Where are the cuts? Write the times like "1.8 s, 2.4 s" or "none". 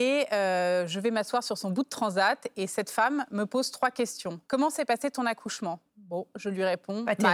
4.4 s, 5.9 s